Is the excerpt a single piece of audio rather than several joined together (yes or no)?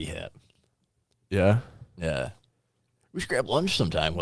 yes